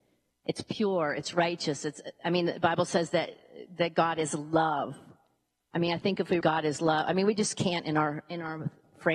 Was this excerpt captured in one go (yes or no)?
no